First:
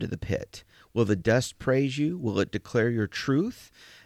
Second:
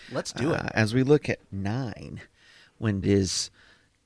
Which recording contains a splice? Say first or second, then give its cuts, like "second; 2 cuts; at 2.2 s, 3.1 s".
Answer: second; 2 cuts; at 1.4 s, 3.0 s